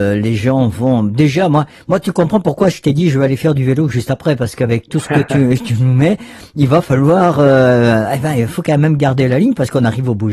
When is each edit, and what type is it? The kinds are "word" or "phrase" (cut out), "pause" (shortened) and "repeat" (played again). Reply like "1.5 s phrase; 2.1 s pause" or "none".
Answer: none